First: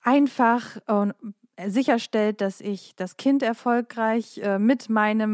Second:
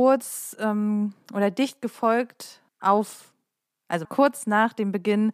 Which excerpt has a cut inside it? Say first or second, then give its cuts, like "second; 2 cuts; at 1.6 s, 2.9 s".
second; 2 cuts; at 2.7 s, 4.0 s